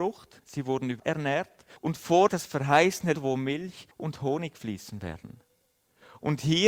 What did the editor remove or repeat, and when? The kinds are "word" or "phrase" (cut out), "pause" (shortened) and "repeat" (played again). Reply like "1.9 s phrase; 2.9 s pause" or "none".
1.0 s word; 1.8 s pause; 2.3 s phrase; 3.1 s word; 3.9 s pause